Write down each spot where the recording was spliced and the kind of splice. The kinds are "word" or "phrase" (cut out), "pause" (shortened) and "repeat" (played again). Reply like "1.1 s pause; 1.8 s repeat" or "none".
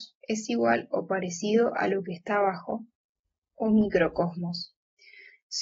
none